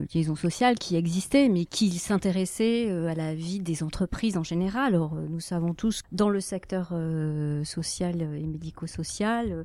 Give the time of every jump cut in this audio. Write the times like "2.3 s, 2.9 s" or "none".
1.7 s, 6.0 s